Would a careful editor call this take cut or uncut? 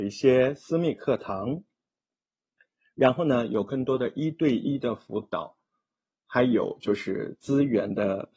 uncut